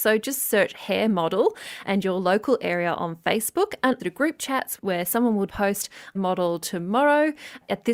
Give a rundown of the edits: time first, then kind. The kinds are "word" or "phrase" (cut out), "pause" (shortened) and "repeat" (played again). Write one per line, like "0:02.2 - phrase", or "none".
0:04.0 - phrase
0:05.5 - word
0:06.1 - phrase